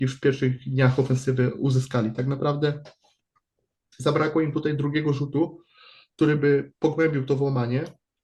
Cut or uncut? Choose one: uncut